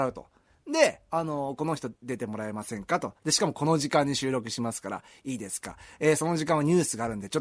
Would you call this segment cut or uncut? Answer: cut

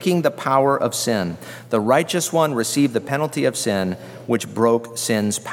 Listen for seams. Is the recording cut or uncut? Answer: uncut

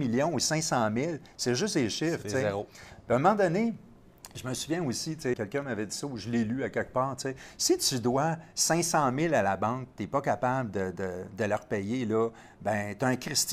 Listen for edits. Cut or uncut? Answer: cut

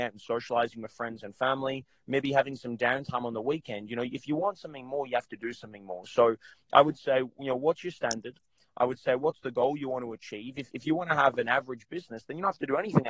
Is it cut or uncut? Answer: uncut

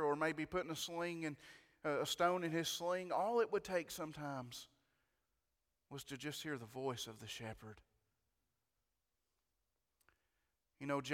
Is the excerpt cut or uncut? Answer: uncut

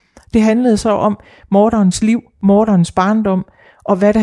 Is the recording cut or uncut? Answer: uncut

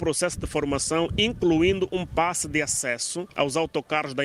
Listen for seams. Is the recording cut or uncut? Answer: uncut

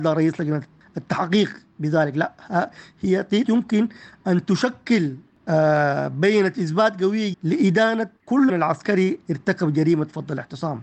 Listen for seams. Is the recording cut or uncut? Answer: cut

